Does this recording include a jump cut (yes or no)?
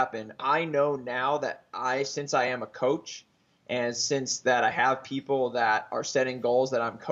no